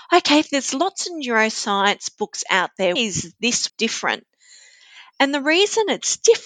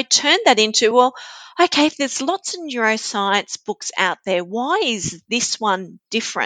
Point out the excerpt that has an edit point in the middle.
first; 2 cuts; at 3.0 s, 3.7 s

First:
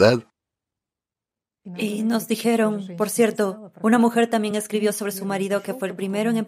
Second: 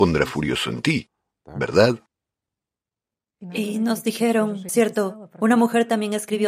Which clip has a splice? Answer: second; 1 cut; at 4.7 s

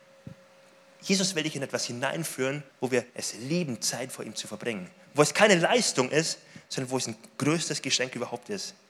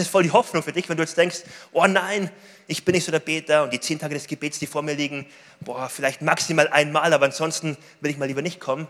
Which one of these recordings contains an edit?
first; 2 cuts; at 2.7 s, 3.1 s

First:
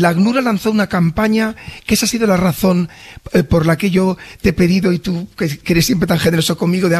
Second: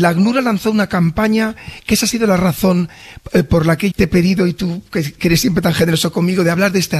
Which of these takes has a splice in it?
second; 1 cut; at 3.9 s

